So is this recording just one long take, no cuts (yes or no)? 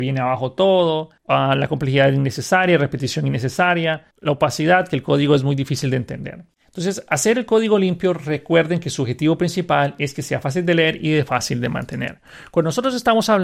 no